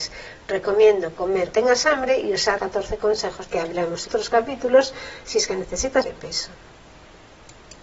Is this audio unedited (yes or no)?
no